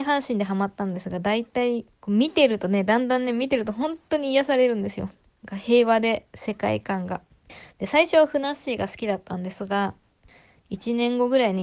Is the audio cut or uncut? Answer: uncut